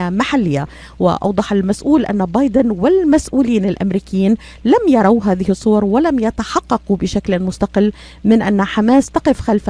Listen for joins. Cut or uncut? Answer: uncut